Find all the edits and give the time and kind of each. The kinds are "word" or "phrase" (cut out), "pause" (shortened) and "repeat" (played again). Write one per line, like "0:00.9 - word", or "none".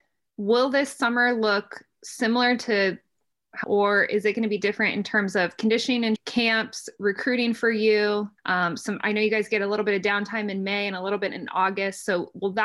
0:03.6 - phrase
0:06.2 - phrase
0:08.4 - pause